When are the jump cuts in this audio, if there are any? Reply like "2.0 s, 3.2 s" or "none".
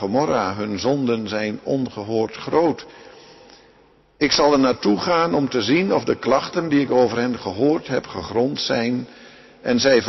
none